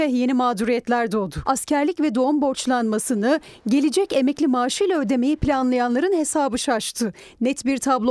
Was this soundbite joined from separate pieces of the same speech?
no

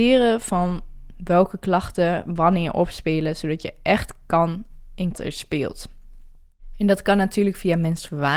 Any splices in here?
yes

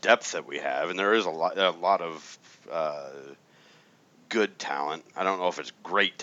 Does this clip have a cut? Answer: no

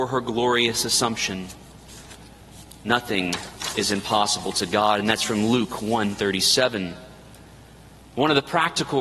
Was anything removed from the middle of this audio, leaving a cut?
no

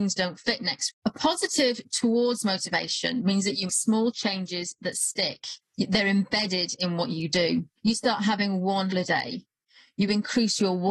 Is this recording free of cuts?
no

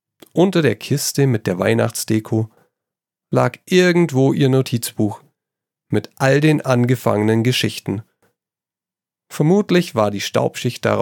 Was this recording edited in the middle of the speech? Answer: no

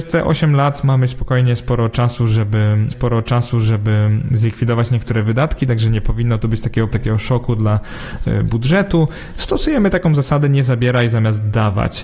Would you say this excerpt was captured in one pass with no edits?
no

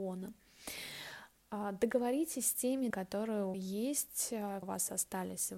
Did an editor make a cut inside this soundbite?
yes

